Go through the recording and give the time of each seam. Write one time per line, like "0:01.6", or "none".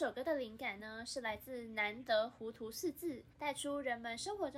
0:03.3

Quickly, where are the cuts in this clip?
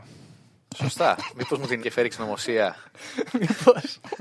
0:01.8
0:02.1

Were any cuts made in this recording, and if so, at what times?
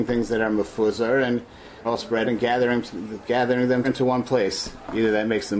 0:01.8
0:02.2
0:03.8

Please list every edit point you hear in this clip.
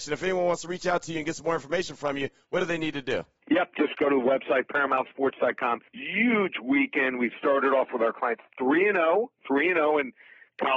0:05.9

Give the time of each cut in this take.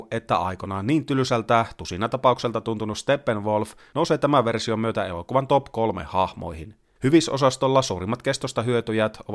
none

